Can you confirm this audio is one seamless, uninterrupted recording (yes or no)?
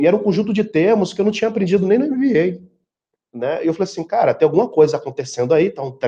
yes